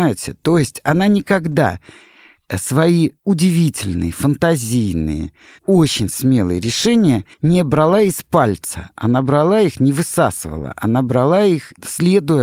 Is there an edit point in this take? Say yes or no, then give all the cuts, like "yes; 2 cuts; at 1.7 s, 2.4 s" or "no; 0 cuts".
yes; 1 cut; at 7.3 s